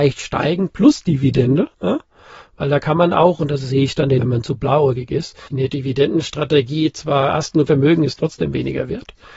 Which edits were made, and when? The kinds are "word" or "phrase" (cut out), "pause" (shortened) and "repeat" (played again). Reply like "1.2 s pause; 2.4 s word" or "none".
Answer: 1.7 s pause; 4.2 s word; 5.5 s pause; 7.7 s phrase

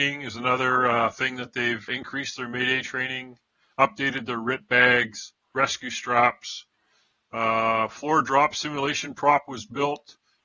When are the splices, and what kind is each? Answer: 1.9 s word

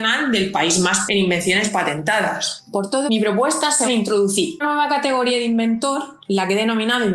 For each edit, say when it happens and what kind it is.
1.1 s word; 3.1 s word; 3.8 s word; 4.6 s word

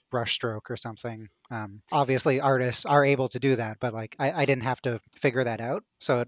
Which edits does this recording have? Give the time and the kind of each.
5.1 s pause

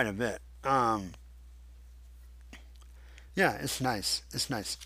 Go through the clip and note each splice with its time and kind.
none

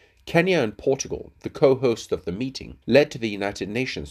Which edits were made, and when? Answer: 2.8 s pause

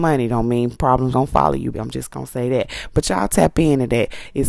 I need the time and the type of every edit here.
1.1 s word; 1.7 s word

